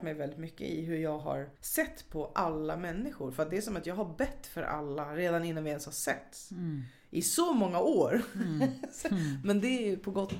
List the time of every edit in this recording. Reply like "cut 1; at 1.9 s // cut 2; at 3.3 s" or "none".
cut 1; at 1.6 s